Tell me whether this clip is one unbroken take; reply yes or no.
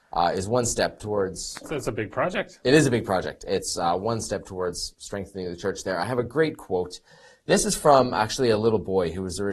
yes